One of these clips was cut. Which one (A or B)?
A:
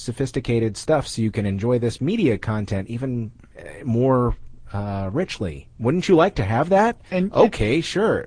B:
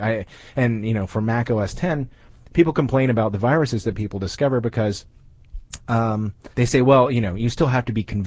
B